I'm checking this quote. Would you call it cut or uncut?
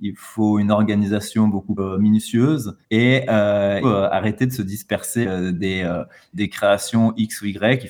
cut